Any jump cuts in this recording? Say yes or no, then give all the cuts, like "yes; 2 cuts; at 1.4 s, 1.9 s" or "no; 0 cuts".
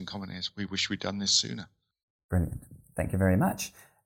no; 0 cuts